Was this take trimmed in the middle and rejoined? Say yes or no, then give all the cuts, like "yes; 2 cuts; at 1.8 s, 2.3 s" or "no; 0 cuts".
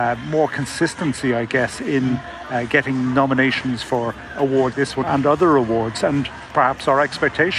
yes; 2 cuts; at 4.7 s, 5.0 s